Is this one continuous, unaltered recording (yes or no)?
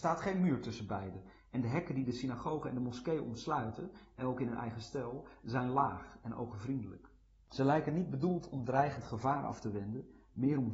yes